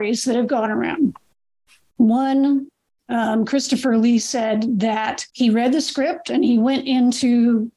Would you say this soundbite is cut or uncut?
cut